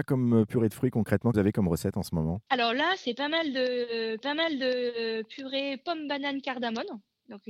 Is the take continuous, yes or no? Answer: no